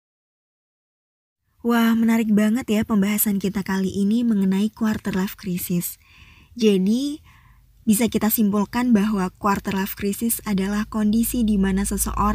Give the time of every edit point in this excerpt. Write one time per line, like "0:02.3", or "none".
none